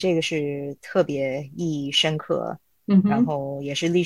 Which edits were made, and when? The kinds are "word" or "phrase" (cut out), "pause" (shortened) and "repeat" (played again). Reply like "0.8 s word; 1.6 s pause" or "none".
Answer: none